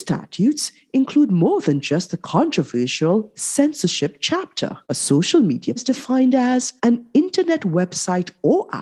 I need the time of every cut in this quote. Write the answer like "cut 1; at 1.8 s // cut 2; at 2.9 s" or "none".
cut 1; at 4.8 s // cut 2; at 5.8 s // cut 3; at 6.8 s